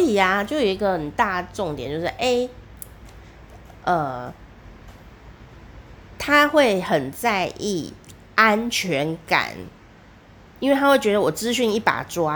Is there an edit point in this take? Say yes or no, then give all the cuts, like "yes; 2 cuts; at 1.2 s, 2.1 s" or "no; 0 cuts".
no; 0 cuts